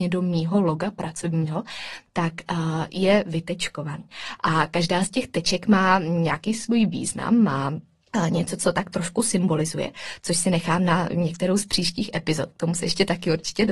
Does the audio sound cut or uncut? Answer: uncut